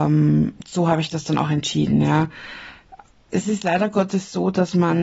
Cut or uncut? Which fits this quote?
uncut